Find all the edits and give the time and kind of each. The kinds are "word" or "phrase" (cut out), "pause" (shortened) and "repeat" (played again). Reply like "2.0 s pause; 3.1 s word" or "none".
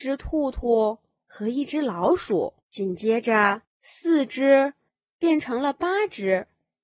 2.6 s pause; 3.7 s pause

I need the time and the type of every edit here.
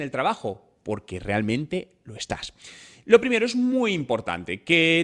none

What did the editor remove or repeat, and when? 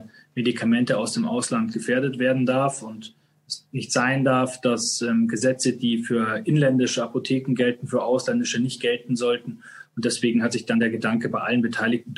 none

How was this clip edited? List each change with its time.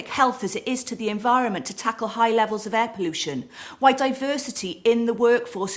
none

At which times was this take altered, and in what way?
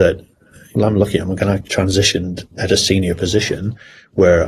2.5 s pause

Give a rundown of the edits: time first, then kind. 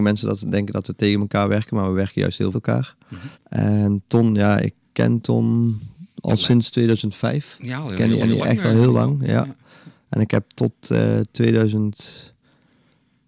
2.5 s phrase; 3.3 s pause; 8.2 s repeat

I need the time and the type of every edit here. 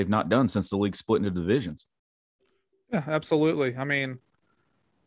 none

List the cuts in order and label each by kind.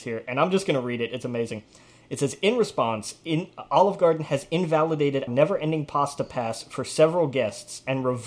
5.3 s word

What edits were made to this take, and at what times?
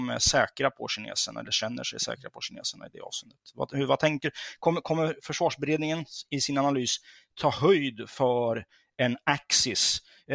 none

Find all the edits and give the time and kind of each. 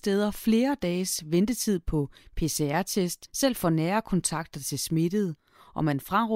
none

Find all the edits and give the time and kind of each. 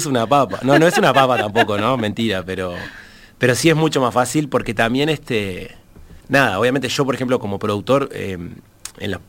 6.2 s pause

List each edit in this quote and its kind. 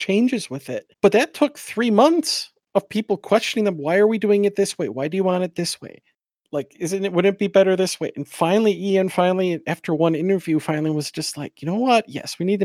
0.9 s pause

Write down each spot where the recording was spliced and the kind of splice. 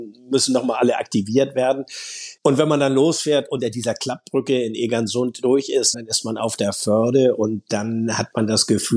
2.4 s pause; 5.9 s word

